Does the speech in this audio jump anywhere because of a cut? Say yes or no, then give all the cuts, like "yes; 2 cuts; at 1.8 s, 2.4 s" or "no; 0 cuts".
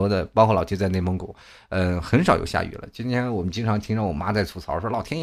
no; 0 cuts